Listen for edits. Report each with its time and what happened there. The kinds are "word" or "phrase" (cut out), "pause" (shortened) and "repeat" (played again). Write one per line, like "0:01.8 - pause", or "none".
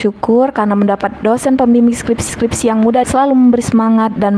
0:02.3 - repeat
0:03.0 - word